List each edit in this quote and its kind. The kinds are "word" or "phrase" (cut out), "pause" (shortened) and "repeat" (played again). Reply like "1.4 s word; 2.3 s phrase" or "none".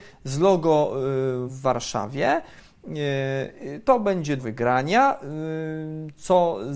1.5 s phrase; 4.4 s word